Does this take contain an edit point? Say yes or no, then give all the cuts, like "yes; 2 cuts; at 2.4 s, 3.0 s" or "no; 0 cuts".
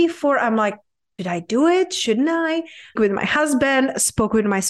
yes; 2 cuts; at 1.2 s, 3.0 s